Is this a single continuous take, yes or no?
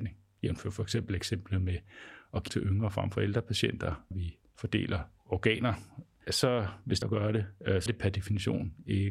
no